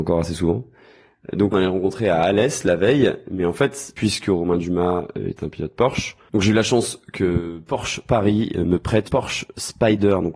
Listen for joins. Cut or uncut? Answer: cut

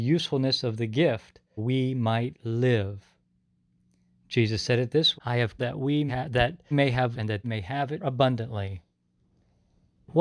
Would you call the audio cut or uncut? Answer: cut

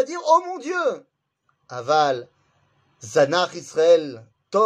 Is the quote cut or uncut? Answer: uncut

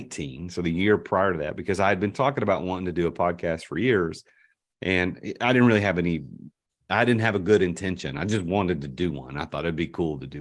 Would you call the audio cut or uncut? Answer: uncut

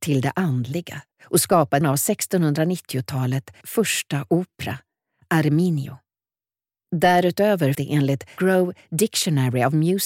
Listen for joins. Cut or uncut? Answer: cut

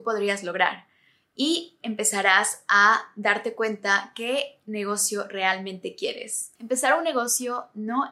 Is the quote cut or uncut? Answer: uncut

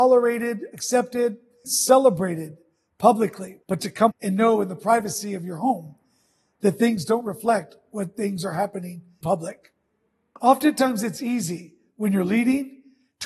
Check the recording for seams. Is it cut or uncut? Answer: cut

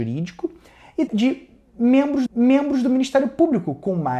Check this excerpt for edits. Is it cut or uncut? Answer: cut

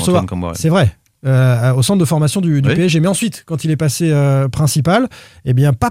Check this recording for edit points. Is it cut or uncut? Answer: uncut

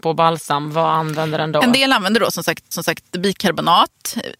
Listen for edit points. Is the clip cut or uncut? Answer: cut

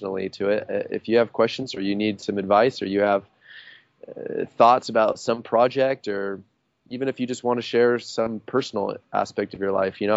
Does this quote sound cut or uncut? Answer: uncut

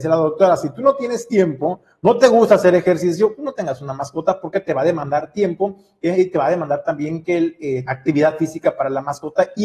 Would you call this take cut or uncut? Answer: uncut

